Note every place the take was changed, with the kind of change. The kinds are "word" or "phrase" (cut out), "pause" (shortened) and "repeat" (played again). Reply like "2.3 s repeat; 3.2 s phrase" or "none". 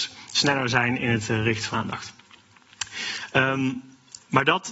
1.7 s word